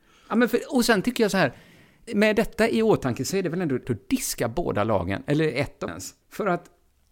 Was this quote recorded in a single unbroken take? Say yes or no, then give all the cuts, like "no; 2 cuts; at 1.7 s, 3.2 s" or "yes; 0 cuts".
no; 4 cuts; at 2.1 s, 3.8 s, 5.9 s, 6.2 s